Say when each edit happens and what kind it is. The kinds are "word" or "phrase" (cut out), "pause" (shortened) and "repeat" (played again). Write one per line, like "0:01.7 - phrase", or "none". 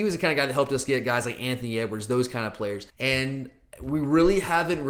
0:02.9 - pause